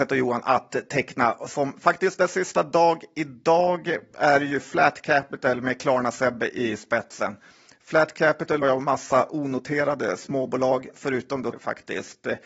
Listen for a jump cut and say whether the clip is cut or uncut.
cut